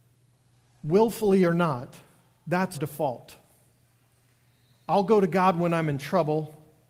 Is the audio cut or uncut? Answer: cut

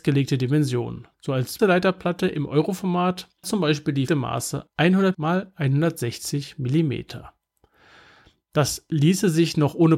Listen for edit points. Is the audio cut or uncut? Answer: cut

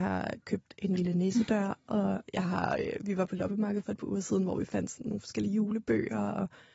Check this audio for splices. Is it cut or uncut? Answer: uncut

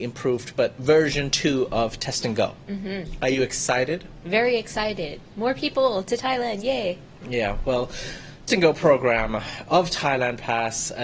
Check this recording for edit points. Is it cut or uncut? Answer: cut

